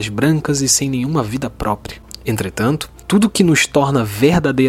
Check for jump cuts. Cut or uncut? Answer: uncut